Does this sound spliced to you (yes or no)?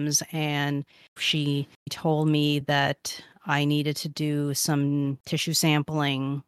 no